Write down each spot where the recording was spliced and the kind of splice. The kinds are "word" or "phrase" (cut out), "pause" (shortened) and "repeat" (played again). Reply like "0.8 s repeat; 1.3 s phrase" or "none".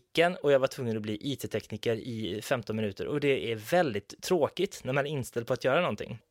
none